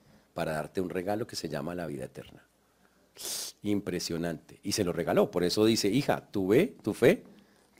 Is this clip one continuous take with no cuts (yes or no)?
yes